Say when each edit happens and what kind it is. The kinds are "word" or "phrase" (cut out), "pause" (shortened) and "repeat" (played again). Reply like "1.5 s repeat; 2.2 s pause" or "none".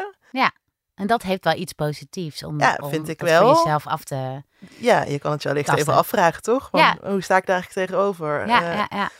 none